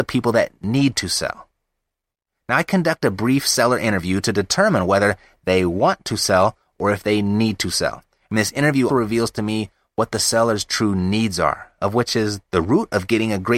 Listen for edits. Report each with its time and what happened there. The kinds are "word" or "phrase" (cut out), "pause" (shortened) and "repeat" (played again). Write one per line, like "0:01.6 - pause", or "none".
0:08.9 - word